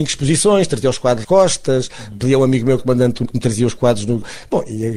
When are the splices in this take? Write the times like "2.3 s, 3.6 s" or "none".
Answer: 1.2 s, 2.8 s, 3.2 s

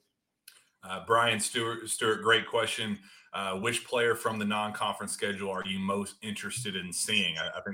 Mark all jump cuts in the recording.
none

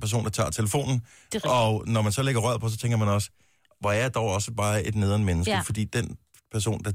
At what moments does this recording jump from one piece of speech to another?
none

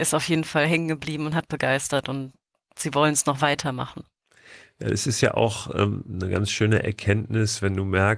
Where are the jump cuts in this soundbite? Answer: none

